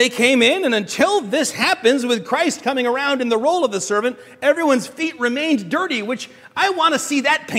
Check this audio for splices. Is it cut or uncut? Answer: uncut